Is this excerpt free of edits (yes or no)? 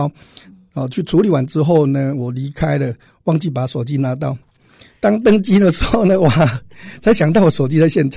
yes